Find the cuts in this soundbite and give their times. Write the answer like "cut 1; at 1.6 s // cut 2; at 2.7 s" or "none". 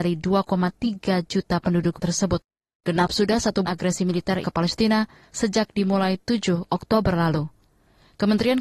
cut 1; at 2.0 s // cut 2; at 3.6 s // cut 3; at 4.4 s